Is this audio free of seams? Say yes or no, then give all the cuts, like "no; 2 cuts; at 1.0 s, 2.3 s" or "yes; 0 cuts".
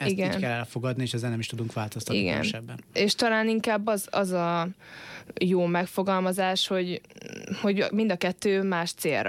yes; 0 cuts